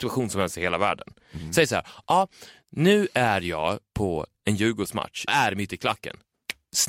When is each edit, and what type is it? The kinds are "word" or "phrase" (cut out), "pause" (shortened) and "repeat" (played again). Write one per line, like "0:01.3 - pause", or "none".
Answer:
0:05.3 - word